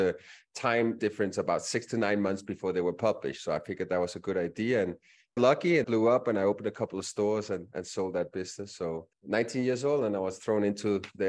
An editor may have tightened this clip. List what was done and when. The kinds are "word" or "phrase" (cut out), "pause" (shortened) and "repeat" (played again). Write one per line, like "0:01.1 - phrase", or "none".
0:01.0 - word
0:05.4 - phrase
0:05.8 - word
0:09.1 - pause